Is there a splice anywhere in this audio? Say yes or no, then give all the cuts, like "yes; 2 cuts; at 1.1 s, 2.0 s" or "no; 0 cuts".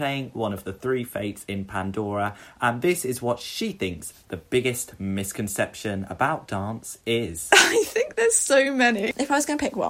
no; 0 cuts